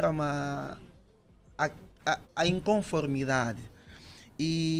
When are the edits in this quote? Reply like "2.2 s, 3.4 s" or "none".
2.2 s